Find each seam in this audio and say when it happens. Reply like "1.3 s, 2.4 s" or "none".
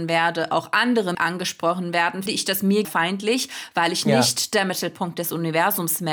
1.1 s, 2.3 s, 2.8 s